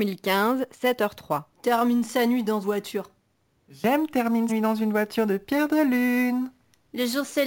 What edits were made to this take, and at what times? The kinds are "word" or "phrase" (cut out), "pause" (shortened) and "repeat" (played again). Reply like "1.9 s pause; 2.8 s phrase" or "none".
1.5 s pause; 2.6 s word; 4.5 s word